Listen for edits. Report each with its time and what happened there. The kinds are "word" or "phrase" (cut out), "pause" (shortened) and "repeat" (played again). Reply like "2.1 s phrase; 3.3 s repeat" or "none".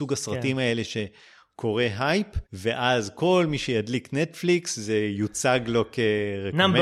2.5 s pause